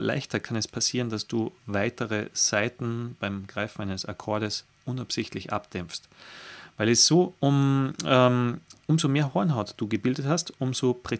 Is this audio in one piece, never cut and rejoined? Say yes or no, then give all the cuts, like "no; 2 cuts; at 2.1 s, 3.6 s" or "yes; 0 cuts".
yes; 0 cuts